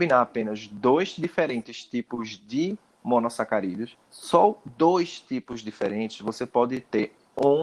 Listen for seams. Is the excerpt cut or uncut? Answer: cut